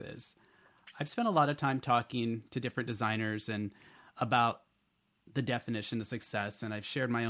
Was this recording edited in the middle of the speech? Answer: no; 0 cuts

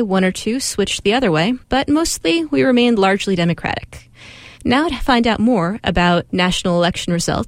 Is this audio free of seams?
no; 2 cuts; at 1.6 s, 4.5 s

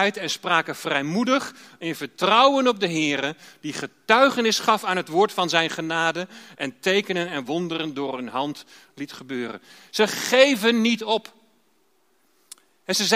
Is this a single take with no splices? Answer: yes; 0 cuts

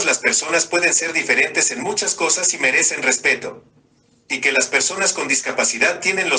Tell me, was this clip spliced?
no; 0 cuts

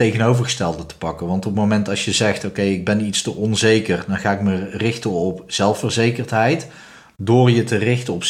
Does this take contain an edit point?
no; 0 cuts

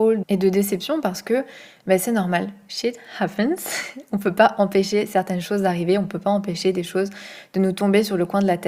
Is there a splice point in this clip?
no; 0 cuts

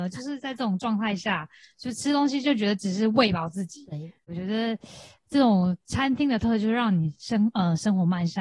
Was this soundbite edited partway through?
yes; 1 cut; at 4.3 s

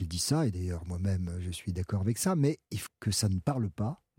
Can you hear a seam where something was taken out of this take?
yes; 1 cut; at 2.9 s

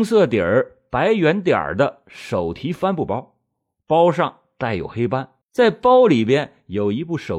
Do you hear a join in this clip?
yes; 1 cut; at 5.4 s

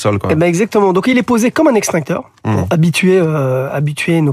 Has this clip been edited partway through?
no; 0 cuts

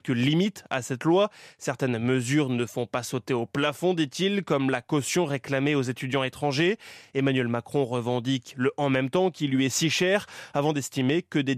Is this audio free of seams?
yes; 0 cuts

